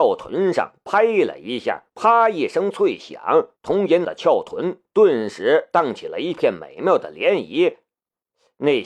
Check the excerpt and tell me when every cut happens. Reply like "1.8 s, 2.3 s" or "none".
1.9 s, 3.6 s, 4.0 s